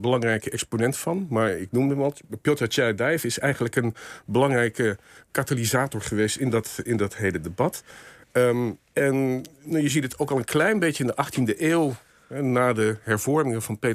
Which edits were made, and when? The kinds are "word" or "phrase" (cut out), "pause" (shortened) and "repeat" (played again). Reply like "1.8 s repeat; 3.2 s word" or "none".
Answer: none